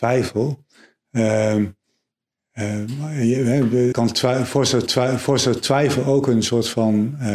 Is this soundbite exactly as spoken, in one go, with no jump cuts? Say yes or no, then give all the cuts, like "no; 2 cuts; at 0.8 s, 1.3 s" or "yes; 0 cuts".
no; 2 cuts; at 3.9 s, 4.9 s